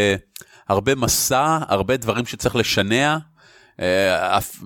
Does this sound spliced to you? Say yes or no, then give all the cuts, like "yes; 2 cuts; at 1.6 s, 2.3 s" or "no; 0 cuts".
no; 0 cuts